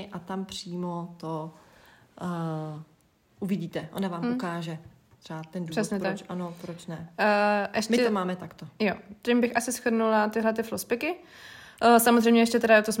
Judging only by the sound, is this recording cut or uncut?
uncut